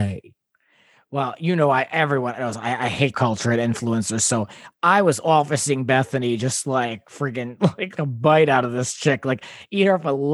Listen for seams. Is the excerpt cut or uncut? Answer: cut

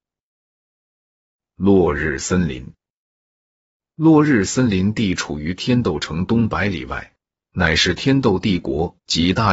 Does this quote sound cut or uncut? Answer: uncut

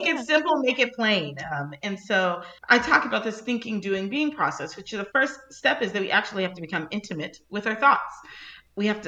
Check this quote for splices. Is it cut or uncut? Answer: cut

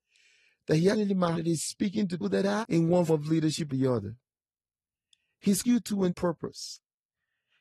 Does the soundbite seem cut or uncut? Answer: cut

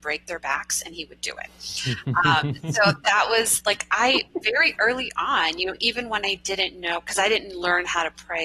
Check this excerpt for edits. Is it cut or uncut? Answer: uncut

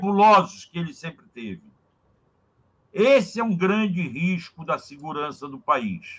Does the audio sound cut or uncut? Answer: uncut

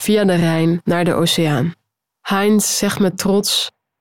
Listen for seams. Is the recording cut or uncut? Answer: uncut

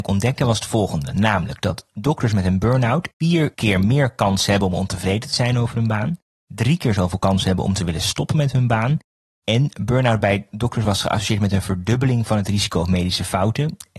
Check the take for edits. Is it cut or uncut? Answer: uncut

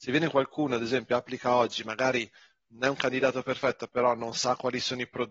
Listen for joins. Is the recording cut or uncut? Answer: uncut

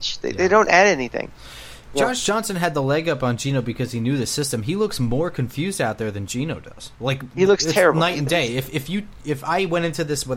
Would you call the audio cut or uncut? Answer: uncut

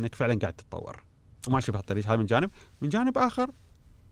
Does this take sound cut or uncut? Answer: uncut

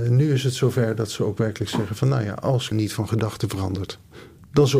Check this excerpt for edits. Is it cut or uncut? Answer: cut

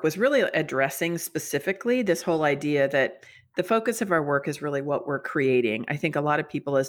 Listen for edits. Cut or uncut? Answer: uncut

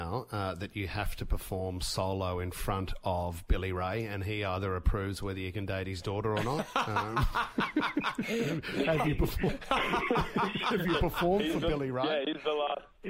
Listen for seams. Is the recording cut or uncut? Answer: uncut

